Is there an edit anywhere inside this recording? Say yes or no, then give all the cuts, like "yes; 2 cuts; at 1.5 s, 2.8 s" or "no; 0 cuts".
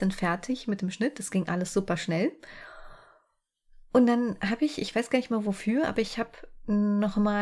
no; 0 cuts